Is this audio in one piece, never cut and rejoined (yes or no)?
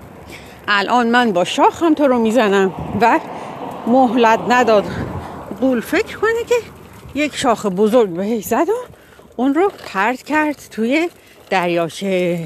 yes